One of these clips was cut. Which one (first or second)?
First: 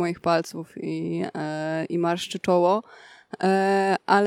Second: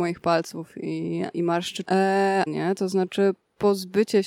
second